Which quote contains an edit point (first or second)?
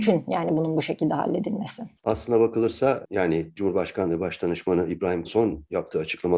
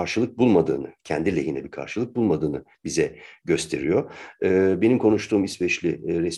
first